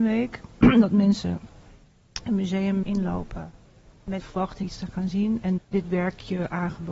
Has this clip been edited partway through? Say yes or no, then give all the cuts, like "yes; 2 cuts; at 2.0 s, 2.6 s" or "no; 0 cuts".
yes; 4 cuts; at 2.8 s, 4.2 s, 4.6 s, 5.6 s